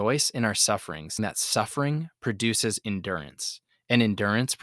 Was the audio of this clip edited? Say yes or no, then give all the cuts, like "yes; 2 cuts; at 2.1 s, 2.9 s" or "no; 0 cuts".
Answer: yes; 1 cut; at 1.2 s